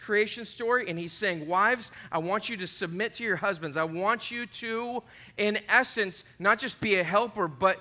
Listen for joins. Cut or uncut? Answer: uncut